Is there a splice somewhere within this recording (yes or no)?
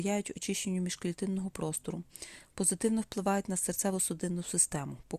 no